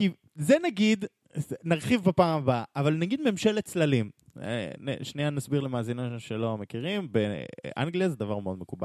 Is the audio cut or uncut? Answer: uncut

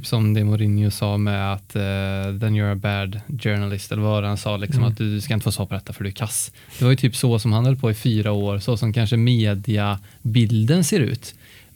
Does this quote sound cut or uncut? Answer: uncut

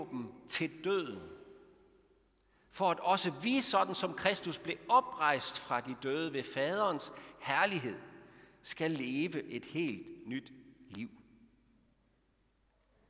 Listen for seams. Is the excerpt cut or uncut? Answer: uncut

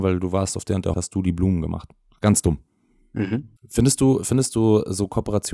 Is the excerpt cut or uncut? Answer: cut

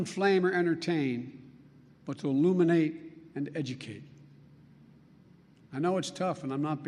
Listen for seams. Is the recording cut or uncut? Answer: uncut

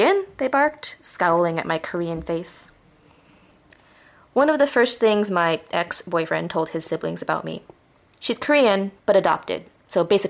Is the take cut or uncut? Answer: uncut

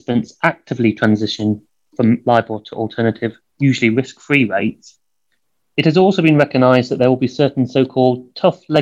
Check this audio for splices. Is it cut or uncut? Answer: uncut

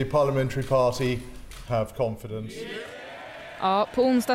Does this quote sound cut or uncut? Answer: cut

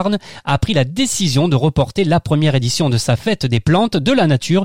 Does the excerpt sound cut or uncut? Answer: uncut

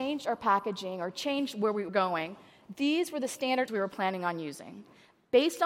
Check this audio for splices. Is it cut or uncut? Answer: cut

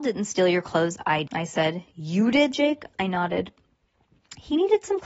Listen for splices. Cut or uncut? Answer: cut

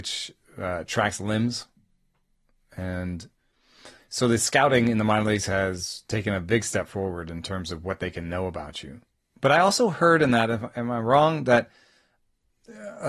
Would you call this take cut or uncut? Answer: uncut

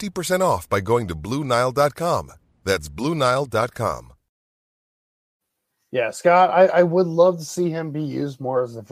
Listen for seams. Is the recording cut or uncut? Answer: uncut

